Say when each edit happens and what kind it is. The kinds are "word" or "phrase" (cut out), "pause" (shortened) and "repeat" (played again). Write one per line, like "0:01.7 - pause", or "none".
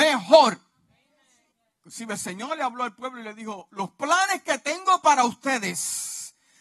0:01.5 - pause

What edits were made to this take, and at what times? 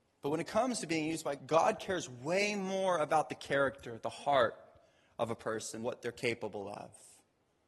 0:01.4 - word
0:05.8 - word

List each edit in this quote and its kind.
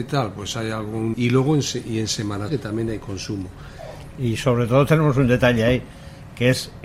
0:01.1 - phrase
0:02.5 - word

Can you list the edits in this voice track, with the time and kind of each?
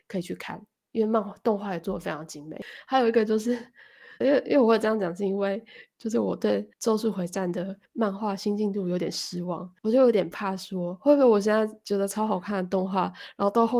0:04.2 - word
0:06.7 - pause
0:07.9 - pause
0:09.8 - pause

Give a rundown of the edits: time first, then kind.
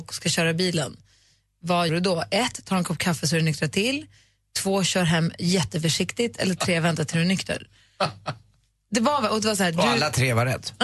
0:01.9 - word

